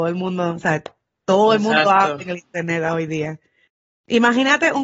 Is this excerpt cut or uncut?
uncut